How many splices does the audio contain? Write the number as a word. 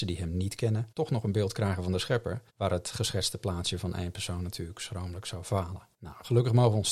three